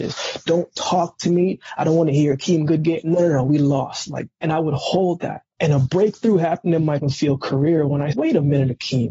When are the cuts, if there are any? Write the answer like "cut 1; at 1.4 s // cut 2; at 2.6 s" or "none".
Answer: cut 1; at 4.3 s // cut 2; at 5.5 s // cut 3; at 7.0 s // cut 4; at 8.1 s